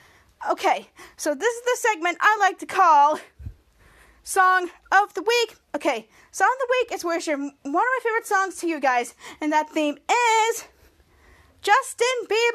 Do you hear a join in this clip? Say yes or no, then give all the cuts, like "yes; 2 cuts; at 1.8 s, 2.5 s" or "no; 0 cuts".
no; 0 cuts